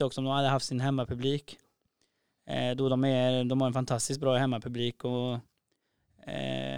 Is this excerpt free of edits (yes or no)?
yes